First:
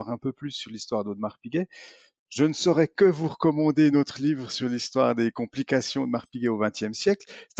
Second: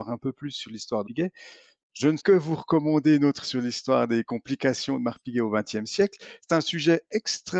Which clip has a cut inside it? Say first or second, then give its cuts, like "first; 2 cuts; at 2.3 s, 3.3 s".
second; 3 cuts; at 1.0 s, 2.2 s, 3.4 s